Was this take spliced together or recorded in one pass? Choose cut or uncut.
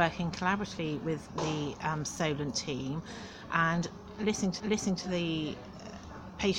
cut